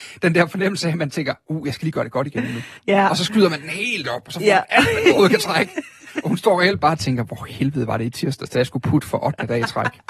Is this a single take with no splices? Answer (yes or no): no